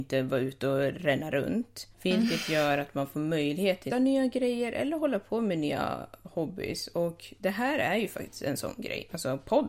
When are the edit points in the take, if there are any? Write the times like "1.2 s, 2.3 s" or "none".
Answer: 1.9 s, 3.9 s

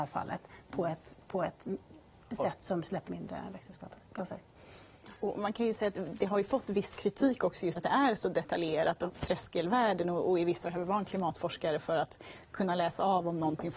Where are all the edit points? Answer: 3.1 s, 7.8 s, 9.1 s, 10.6 s

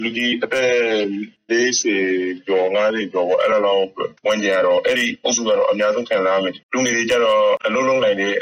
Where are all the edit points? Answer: 4.2 s, 6.6 s

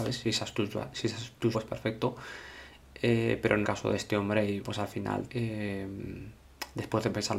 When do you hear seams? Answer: 1.5 s, 3.6 s, 4.6 s, 5.3 s

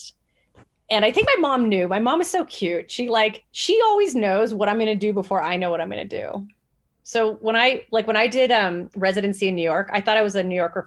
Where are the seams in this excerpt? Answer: 3.5 s

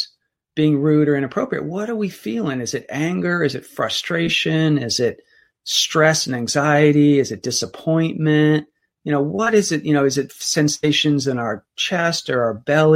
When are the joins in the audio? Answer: none

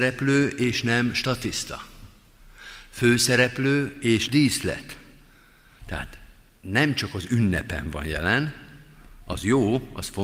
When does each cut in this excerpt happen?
4.3 s

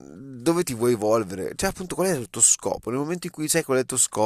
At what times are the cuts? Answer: none

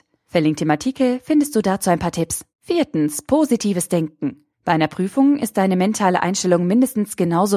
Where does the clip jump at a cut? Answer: 2.5 s, 4.5 s

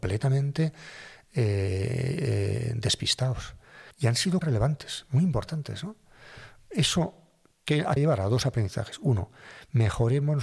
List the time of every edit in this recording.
3.9 s, 4.4 s, 8.0 s

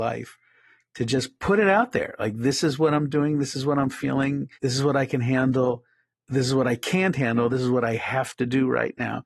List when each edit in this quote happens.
4.5 s, 6.1 s

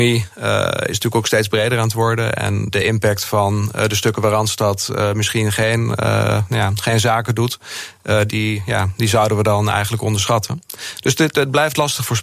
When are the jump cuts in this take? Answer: 2.7 s, 8.3 s

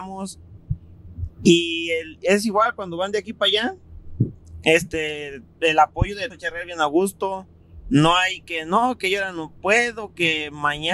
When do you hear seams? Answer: 6.3 s

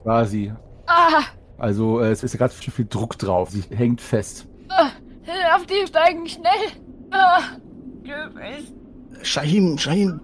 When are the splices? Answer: 2.6 s, 3.5 s, 5.9 s

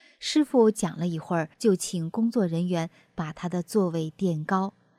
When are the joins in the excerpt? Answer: 1.5 s

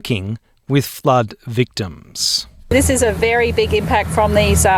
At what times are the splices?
none

